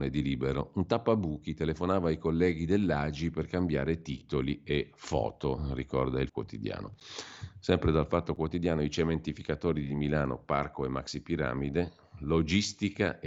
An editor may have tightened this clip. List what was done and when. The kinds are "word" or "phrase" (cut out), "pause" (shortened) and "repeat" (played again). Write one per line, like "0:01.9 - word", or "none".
0:06.3 - word